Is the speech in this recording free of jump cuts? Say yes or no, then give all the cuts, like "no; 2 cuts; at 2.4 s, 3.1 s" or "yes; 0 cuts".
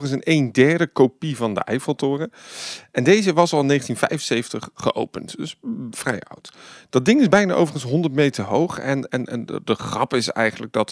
yes; 0 cuts